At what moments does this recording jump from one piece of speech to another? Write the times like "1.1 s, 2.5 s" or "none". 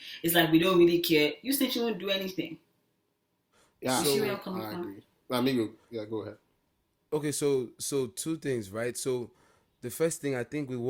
none